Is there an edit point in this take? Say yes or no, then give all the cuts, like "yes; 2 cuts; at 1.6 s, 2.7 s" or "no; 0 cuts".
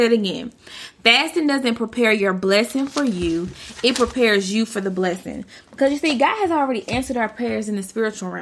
no; 0 cuts